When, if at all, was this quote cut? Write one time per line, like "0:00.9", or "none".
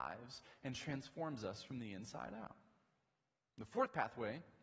none

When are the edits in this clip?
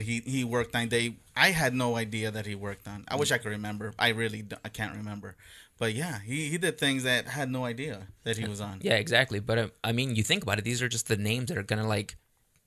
0:08.2

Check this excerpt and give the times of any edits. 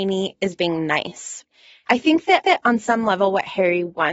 0:02.4

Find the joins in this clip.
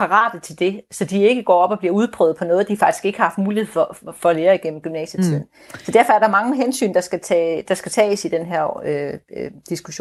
none

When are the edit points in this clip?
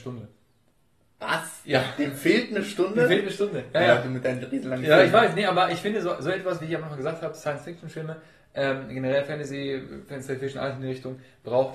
none

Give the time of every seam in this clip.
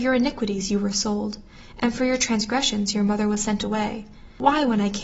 none

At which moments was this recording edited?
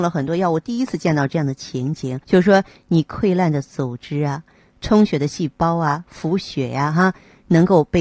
0:02.2

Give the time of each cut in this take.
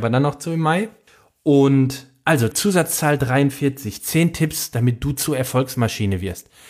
0:01.1
0:02.5

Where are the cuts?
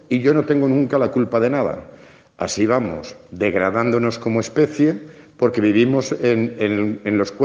none

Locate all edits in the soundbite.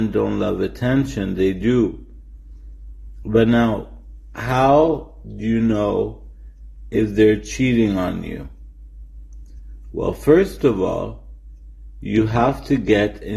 none

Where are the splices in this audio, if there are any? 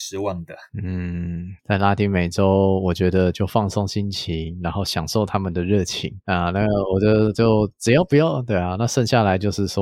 0:01.6

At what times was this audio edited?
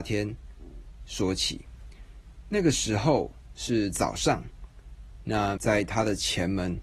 0:05.6

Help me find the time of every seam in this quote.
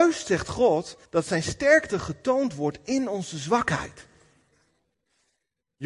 0:01.1

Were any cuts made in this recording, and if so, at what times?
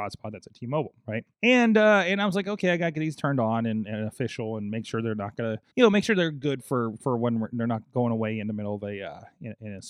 0:01.3
0:05.7

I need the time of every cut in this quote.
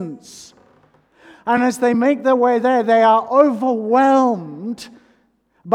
none

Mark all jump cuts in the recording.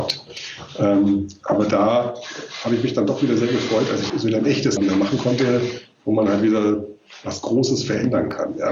0:04.1
0:04.8

